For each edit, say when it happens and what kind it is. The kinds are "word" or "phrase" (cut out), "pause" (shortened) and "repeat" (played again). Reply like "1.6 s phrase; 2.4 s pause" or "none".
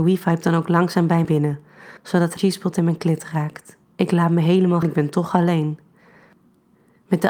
1.2 s phrase; 2.0 s pause; 2.4 s word; 3.8 s pause; 4.8 s word